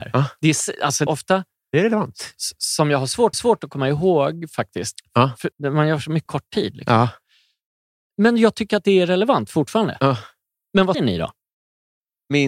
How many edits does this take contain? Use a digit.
5